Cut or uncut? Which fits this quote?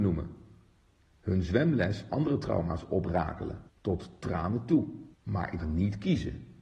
cut